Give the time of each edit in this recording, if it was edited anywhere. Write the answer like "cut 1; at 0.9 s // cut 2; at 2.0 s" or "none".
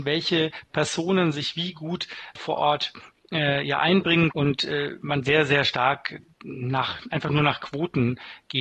cut 1; at 2.4 s // cut 2; at 4.3 s